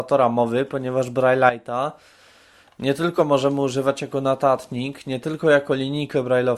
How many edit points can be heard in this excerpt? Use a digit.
0